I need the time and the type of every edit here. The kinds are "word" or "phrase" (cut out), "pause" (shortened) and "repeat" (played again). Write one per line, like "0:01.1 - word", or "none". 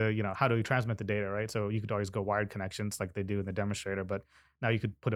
none